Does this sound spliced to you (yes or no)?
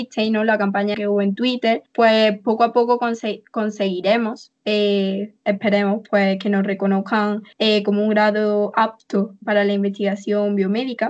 yes